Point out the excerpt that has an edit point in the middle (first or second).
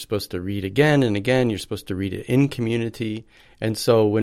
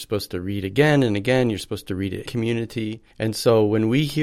second